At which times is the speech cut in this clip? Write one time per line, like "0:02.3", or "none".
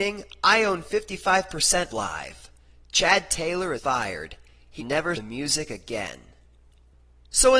0:01.9
0:03.8
0:04.8
0:05.1